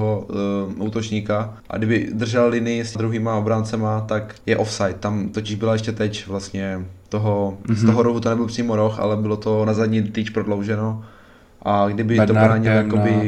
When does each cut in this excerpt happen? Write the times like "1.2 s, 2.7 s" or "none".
1.6 s, 2.9 s, 4.4 s